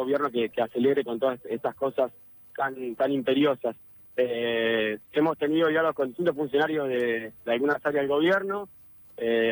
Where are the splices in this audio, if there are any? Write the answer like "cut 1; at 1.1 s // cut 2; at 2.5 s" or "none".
cut 1; at 5.0 s // cut 2; at 7.4 s

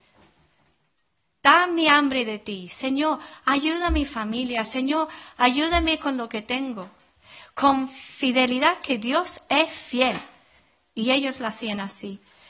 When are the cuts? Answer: none

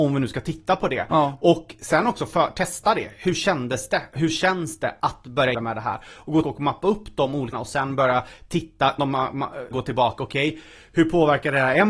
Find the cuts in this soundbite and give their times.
cut 1; at 5.5 s // cut 2; at 6.4 s // cut 3; at 7.5 s // cut 4; at 9.0 s // cut 5; at 9.7 s

